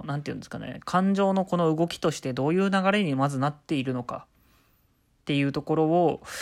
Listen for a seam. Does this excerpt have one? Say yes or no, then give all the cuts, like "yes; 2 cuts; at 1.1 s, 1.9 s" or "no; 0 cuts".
no; 0 cuts